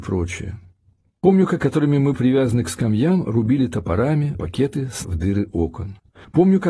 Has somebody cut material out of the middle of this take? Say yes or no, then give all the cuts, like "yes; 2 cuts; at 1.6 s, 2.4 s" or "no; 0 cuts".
yes; 4 cuts; at 1.6 s, 2.1 s, 4.3 s, 5.0 s